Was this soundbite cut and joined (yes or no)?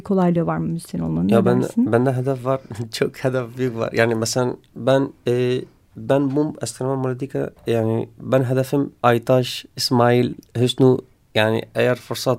yes